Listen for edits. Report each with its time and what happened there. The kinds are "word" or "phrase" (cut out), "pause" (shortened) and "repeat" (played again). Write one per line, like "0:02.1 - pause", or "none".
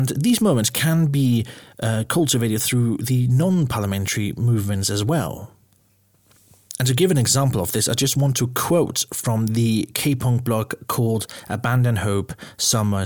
none